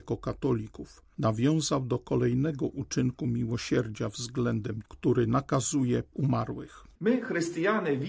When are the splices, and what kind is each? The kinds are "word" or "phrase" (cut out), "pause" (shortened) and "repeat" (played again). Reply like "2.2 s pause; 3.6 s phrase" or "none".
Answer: 4.8 s word; 6.1 s word